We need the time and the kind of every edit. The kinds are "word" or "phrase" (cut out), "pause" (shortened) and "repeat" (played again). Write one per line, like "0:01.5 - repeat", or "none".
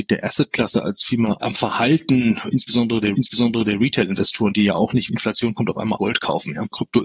0:03.1 - repeat
0:05.1 - word
0:06.0 - word